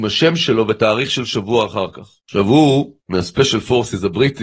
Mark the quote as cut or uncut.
cut